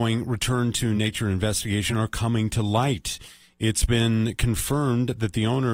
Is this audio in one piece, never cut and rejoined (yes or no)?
yes